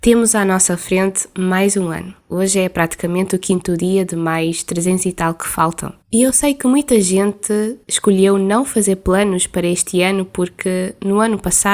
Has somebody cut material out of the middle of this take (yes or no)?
yes